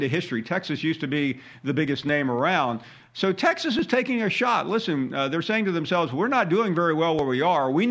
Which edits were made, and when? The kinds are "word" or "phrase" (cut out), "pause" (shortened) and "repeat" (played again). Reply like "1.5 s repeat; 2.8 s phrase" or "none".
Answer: none